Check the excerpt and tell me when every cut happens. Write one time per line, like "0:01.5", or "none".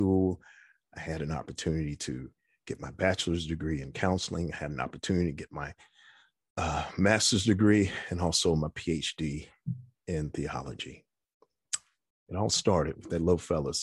none